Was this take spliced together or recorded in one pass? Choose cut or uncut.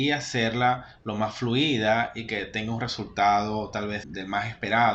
cut